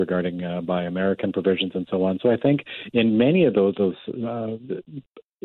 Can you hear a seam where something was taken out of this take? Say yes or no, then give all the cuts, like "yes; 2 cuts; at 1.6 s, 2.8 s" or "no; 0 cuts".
no; 0 cuts